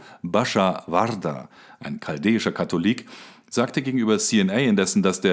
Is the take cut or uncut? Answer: uncut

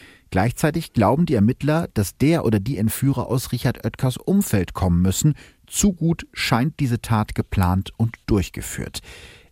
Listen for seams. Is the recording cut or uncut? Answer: uncut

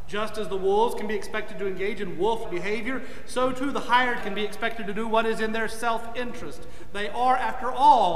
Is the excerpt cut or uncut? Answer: cut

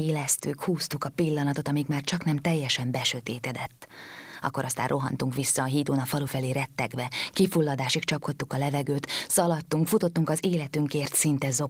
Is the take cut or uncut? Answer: uncut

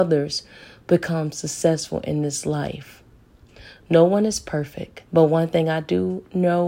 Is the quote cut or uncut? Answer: cut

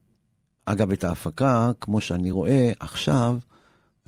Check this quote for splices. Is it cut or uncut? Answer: uncut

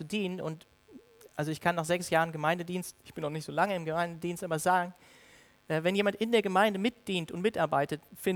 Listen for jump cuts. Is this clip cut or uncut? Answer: cut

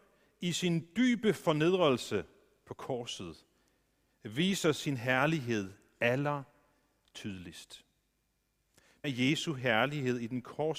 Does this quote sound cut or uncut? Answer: cut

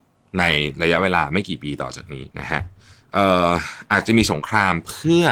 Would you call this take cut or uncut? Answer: cut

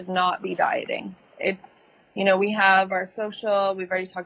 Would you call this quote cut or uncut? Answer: uncut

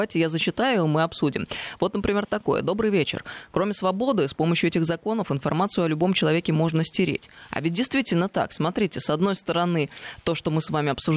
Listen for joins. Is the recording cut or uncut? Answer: uncut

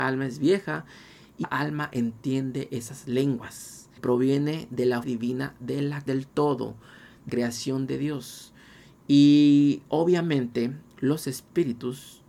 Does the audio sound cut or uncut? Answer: cut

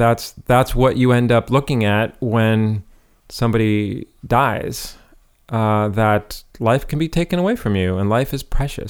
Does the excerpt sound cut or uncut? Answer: uncut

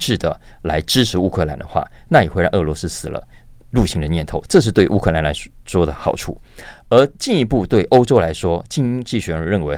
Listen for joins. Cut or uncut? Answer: uncut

